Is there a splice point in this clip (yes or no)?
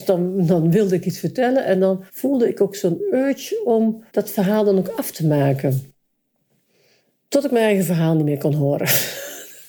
yes